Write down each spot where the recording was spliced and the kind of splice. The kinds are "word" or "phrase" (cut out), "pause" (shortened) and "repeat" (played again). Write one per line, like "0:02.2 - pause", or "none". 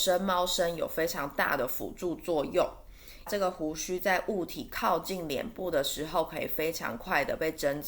0:03.3 - phrase